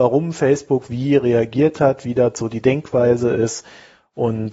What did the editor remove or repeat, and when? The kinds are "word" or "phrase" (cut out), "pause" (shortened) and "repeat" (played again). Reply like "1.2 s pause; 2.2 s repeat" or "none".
none